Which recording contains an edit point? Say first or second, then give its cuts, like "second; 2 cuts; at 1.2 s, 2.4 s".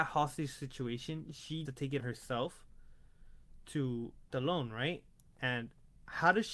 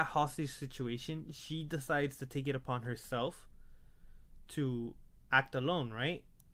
first; 3 cuts; at 1.6 s, 2.0 s, 4.3 s